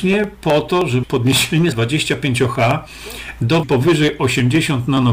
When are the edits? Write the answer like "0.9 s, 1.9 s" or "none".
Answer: 1.0 s, 1.7 s, 3.6 s